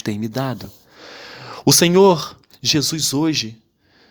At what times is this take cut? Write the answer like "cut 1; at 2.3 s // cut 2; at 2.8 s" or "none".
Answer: none